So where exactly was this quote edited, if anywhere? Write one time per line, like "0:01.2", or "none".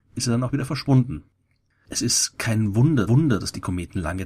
0:03.1